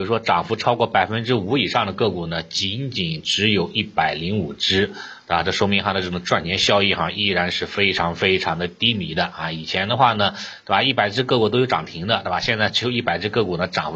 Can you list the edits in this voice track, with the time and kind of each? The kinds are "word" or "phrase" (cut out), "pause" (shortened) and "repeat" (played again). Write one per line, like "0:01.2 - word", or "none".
none